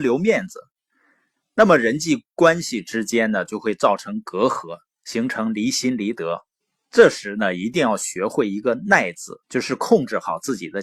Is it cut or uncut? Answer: cut